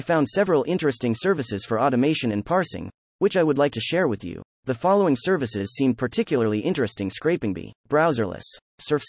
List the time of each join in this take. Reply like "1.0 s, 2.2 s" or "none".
4.5 s, 7.8 s